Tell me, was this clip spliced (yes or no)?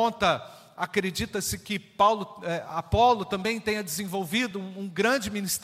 no